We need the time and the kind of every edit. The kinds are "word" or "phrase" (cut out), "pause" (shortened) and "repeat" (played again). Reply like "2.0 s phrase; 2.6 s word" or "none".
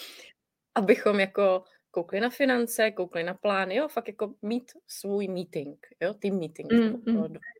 none